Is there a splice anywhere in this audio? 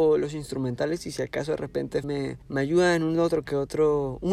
yes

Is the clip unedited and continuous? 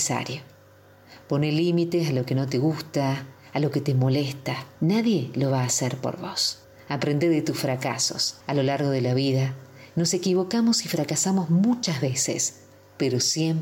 no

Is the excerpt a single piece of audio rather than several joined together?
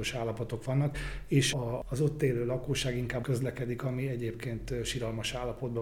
no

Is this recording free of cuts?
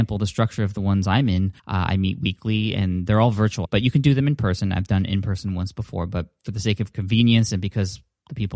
no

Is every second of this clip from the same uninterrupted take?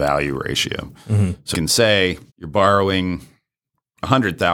no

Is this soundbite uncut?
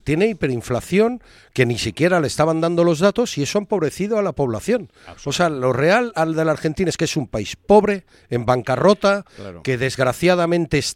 yes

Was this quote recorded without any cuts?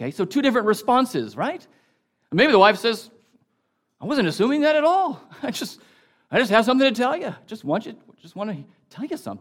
yes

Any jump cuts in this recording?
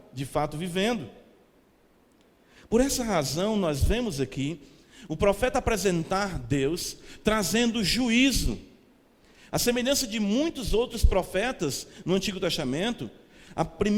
no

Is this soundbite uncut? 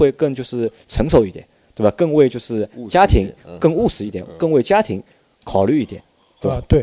yes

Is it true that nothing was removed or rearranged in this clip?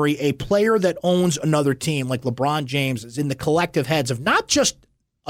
yes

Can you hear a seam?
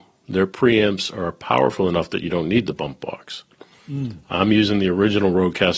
no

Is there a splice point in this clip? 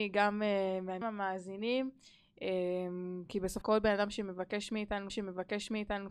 yes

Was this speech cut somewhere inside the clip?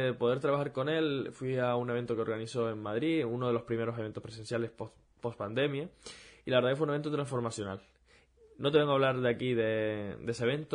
no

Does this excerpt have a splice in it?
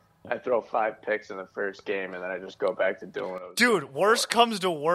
no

